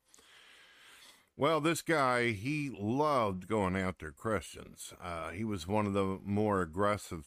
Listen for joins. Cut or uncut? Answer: uncut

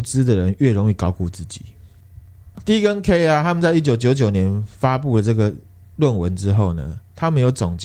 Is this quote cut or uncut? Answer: uncut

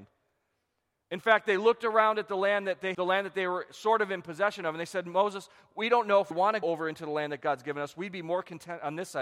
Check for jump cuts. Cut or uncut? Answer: cut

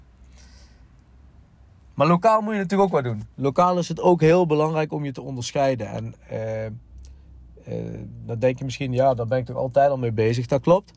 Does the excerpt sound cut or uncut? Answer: uncut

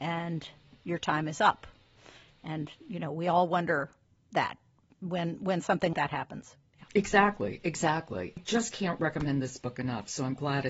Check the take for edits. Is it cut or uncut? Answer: cut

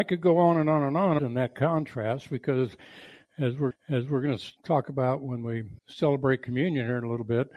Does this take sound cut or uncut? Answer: cut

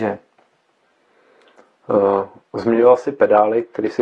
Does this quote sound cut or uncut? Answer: uncut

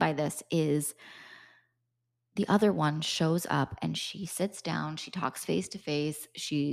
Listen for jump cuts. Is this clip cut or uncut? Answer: uncut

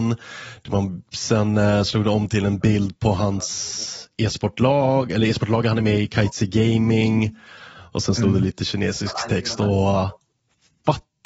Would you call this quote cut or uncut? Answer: uncut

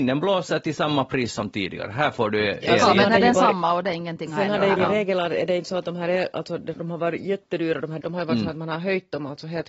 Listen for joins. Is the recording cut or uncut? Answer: cut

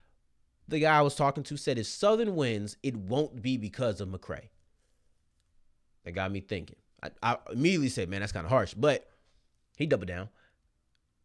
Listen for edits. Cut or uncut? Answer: uncut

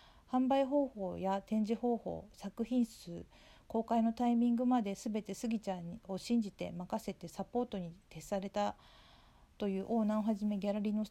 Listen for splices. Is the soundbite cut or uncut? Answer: cut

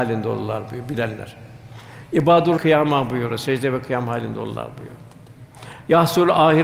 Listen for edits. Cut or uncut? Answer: cut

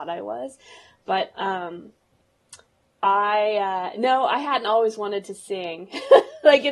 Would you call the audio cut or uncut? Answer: uncut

